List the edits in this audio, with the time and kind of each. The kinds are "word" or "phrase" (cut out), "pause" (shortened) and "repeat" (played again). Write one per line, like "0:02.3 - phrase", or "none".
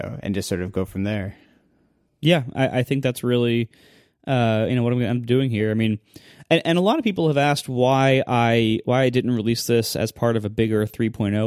none